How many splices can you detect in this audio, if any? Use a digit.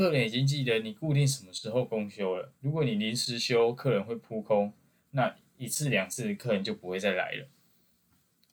1